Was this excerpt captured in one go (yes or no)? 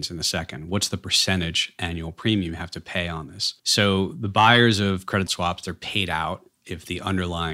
no